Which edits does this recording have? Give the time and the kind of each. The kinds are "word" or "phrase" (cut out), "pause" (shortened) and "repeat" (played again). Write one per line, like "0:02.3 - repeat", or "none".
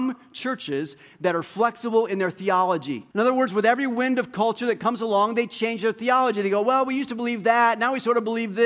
0:03.1 - pause